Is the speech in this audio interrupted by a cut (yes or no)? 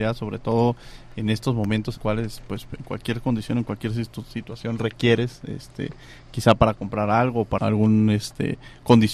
yes